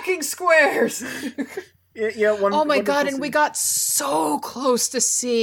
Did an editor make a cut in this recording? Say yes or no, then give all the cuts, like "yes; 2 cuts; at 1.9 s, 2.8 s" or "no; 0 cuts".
no; 0 cuts